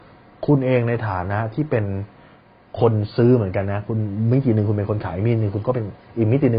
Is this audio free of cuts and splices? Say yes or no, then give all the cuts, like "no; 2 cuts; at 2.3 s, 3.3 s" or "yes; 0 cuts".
yes; 0 cuts